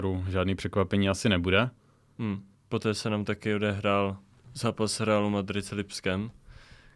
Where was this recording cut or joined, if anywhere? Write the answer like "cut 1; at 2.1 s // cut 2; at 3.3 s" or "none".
none